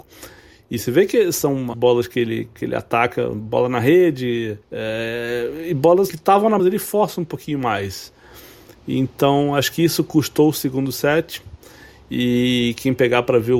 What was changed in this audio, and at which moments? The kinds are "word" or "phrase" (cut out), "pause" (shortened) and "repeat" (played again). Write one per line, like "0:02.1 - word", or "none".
0:01.7 - word
0:04.6 - pause
0:06.1 - word
0:06.6 - phrase